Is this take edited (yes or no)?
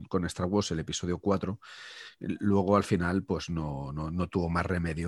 no